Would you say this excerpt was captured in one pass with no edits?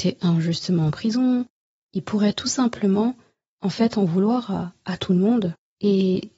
yes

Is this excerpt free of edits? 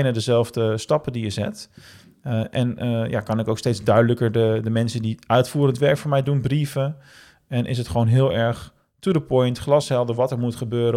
yes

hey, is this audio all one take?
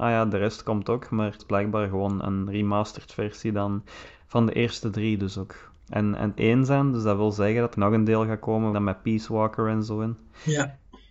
no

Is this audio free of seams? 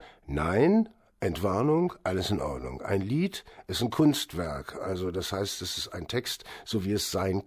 yes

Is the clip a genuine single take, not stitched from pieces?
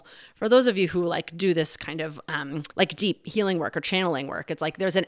no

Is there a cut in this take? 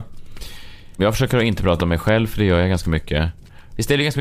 no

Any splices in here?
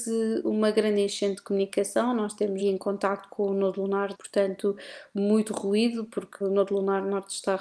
yes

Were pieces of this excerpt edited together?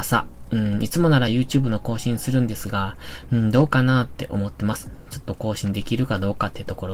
no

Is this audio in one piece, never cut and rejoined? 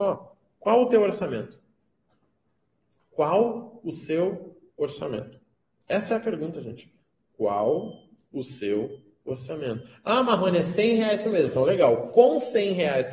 yes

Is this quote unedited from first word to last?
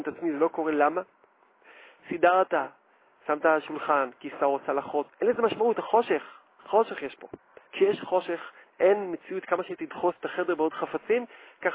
no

